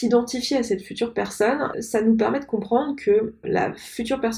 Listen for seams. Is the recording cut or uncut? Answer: cut